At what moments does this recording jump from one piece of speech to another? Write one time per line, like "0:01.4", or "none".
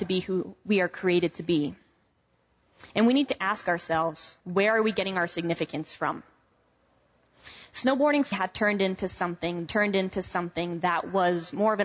0:02.9
0:04.4
0:08.3
0:09.7